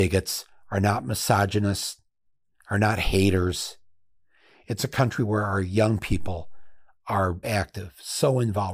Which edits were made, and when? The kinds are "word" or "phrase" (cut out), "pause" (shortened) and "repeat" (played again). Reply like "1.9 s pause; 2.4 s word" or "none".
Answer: 7.4 s word